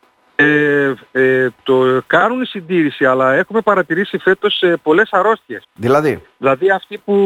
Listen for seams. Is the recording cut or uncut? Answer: cut